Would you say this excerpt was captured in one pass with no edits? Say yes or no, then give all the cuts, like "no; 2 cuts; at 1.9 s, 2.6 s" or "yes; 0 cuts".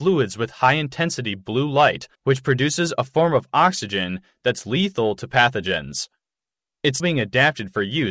no; 2 cuts; at 2.1 s, 7.0 s